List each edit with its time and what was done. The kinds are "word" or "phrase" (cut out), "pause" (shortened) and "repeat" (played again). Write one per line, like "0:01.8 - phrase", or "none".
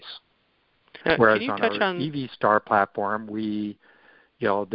0:01.0 - pause